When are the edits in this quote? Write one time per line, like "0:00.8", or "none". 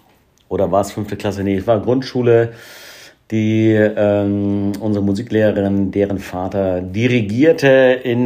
none